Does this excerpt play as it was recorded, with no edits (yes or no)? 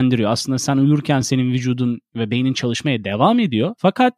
yes